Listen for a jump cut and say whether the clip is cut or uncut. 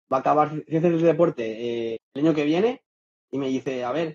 cut